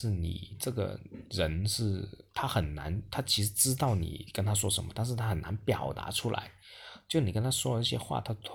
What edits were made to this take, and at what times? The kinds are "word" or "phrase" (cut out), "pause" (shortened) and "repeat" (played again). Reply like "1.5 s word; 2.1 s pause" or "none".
2.3 s pause